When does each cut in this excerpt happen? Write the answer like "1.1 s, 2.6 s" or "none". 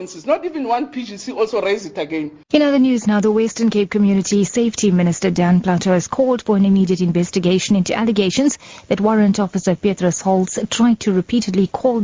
2.4 s